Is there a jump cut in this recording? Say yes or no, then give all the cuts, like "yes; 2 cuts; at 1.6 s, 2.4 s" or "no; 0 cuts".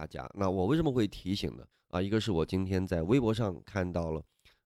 yes; 1 cut; at 1.7 s